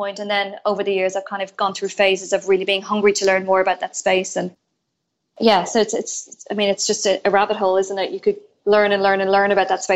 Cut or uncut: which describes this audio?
uncut